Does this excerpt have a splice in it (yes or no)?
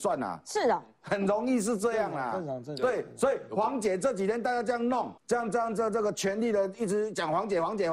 yes